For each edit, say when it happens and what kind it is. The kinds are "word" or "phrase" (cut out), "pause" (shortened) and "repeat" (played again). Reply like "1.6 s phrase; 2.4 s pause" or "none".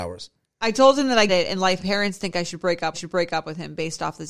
1.3 s word; 1.8 s phrase; 2.9 s repeat